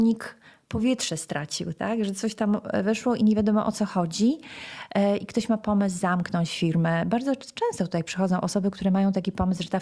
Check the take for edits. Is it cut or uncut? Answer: uncut